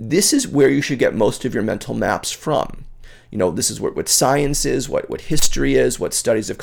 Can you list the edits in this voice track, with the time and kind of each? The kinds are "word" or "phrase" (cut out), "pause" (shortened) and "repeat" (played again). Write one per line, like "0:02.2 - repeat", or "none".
none

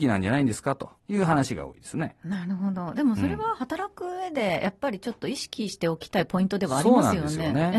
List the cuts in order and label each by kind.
0:01.0 - pause

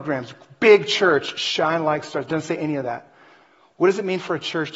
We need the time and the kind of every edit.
none

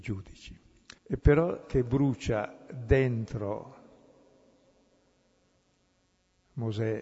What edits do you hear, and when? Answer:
0:01.0 - pause
0:01.6 - phrase

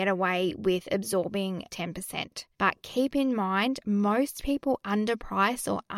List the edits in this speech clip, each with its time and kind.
0:01.7 - word
0:02.5 - pause

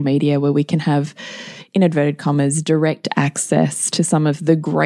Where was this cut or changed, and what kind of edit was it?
none

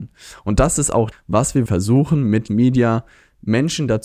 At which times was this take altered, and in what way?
0:01.1 - word
0:01.7 - word
0:02.5 - word

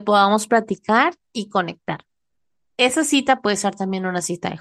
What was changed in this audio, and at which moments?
none

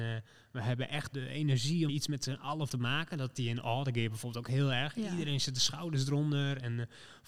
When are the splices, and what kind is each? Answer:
0:01.1 - word
0:01.9 - word
0:02.7 - word
0:03.4 - word

